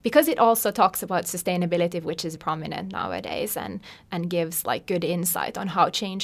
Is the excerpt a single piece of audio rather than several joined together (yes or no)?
no